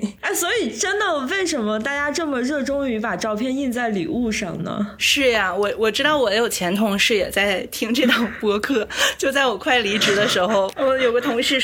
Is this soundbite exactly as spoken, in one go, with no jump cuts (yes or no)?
yes